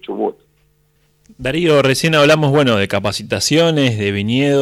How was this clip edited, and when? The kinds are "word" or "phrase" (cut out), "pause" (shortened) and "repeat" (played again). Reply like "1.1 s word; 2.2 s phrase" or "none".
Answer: 1.0 s pause